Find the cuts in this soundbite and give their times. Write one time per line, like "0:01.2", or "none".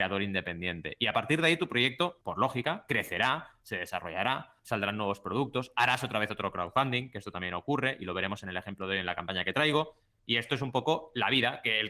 0:02.2